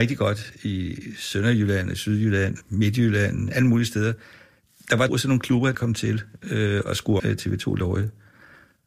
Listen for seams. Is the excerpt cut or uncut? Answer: cut